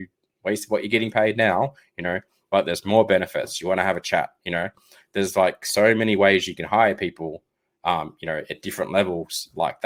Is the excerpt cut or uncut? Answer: uncut